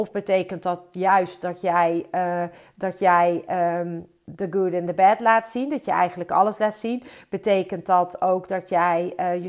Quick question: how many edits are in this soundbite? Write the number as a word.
zero